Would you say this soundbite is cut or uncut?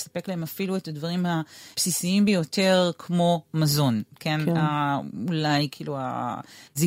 uncut